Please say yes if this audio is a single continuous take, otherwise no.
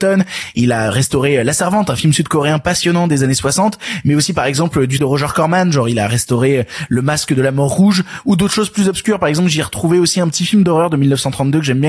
no